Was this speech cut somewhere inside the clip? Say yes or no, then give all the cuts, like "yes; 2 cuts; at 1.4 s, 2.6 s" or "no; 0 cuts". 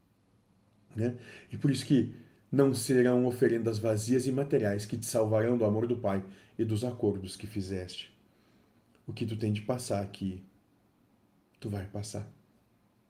no; 0 cuts